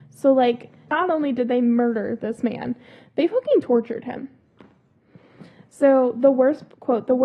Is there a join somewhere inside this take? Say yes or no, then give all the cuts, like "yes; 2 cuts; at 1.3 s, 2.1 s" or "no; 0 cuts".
no; 0 cuts